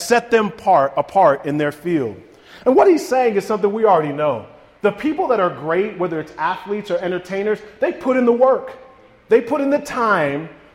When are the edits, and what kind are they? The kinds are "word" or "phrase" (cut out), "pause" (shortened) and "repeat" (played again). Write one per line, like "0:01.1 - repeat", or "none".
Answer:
none